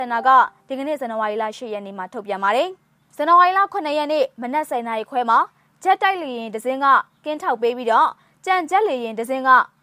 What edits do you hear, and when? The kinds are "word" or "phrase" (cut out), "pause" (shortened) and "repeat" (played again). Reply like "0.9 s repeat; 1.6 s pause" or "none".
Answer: none